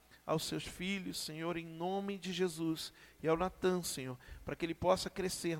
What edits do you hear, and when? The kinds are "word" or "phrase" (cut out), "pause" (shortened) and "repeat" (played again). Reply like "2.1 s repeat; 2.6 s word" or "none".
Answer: none

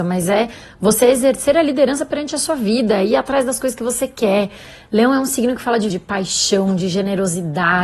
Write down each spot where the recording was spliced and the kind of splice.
5.9 s word

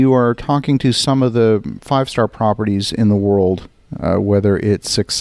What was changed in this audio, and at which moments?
none

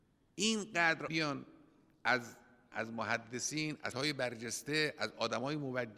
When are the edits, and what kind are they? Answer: 1.1 s word; 2.7 s word; 3.9 s word

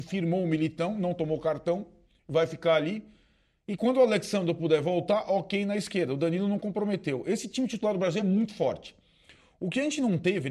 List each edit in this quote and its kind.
none

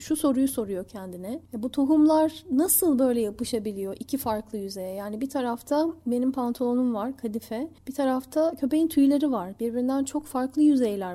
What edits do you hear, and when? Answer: 1.5 s pause; 7.8 s pause

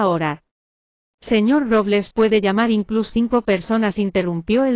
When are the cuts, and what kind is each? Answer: 3.1 s word

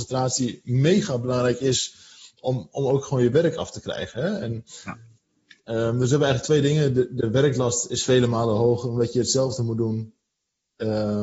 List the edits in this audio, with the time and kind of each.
none

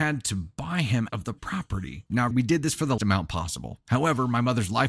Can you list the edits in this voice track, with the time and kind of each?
1.1 s word; 2.3 s word; 3.0 s word

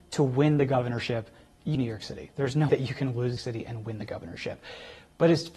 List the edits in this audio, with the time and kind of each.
1.7 s word; 2.7 s word; 3.4 s phrase

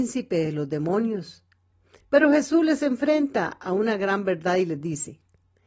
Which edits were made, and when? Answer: none

